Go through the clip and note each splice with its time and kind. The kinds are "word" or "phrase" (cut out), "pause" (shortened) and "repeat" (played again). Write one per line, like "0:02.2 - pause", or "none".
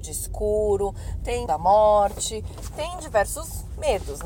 0:01.5 - word